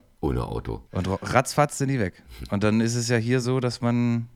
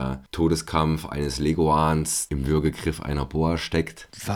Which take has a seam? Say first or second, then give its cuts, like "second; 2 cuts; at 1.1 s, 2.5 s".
second; 1 cut; at 2.3 s